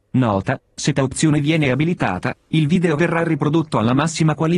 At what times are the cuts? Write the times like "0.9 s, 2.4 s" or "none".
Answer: 1.0 s

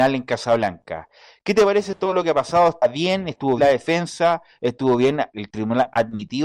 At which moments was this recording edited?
3.6 s, 5.3 s

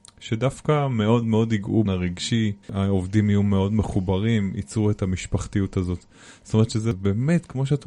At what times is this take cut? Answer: 1.2 s, 1.8 s, 2.6 s

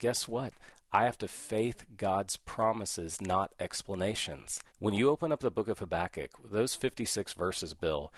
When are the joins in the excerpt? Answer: 4.7 s

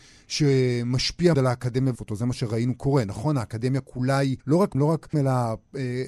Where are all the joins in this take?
1.3 s, 2.0 s, 4.4 s, 4.7 s, 5.1 s

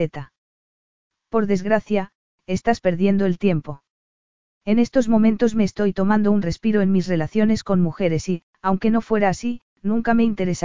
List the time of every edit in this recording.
8.5 s, 9.7 s

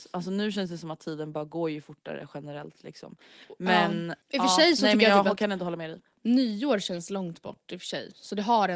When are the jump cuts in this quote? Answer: 4.2 s

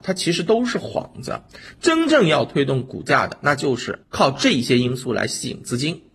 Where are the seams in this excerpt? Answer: 4.0 s

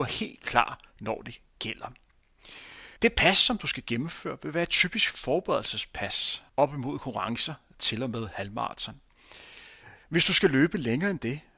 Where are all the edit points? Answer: 3.0 s, 6.5 s, 10.0 s

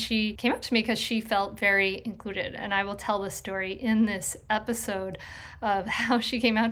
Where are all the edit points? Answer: none

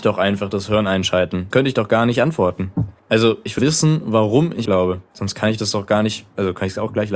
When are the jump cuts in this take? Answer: 1.5 s, 3.0 s, 3.6 s, 4.7 s

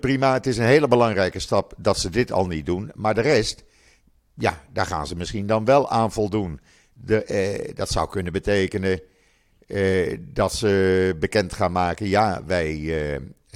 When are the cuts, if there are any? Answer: none

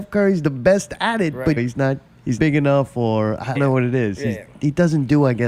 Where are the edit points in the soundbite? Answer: 1.6 s, 2.4 s, 3.6 s

